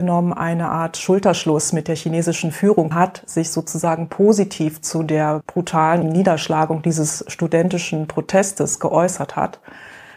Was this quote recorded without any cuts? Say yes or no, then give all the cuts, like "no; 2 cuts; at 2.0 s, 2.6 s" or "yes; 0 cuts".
no; 2 cuts; at 2.9 s, 6.0 s